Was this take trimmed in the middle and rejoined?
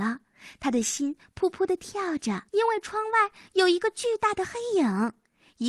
yes; 1 cut; at 2.5 s

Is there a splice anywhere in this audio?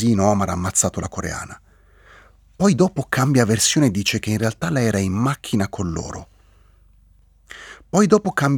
no; 0 cuts

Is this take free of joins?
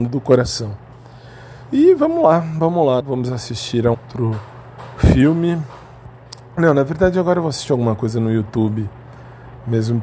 no; 2 cuts; at 3.0 s, 3.9 s

